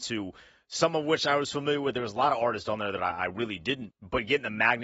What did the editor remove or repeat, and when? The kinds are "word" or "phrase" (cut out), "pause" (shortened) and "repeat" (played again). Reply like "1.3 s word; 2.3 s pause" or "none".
3.9 s word